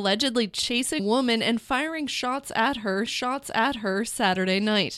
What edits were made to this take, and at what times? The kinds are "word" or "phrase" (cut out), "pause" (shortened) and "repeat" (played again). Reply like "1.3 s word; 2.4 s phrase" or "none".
1.0 s word; 3.1 s repeat